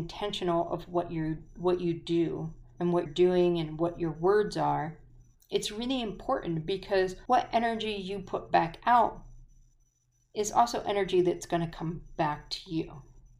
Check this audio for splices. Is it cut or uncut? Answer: cut